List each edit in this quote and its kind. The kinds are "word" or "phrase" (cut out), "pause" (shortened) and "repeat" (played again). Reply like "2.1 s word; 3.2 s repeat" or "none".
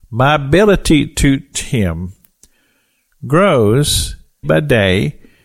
1.5 s word; 4.4 s word